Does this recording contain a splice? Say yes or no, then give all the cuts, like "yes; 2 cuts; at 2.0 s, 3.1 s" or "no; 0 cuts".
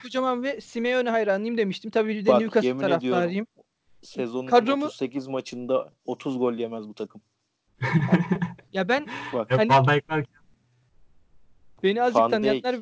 no; 0 cuts